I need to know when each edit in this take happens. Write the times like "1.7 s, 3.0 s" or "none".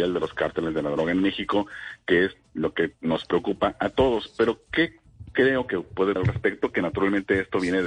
6.2 s